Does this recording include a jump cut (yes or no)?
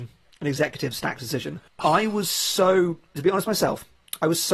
yes